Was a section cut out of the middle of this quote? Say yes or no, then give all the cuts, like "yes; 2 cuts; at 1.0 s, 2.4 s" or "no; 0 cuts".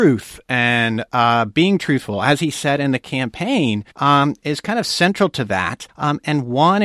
yes; 2 cuts; at 3.9 s, 5.9 s